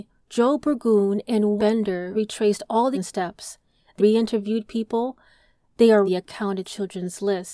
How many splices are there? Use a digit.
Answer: 6